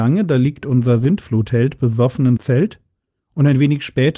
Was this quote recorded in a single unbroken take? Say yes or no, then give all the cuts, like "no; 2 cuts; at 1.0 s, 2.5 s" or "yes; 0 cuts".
no; 1 cut; at 2.4 s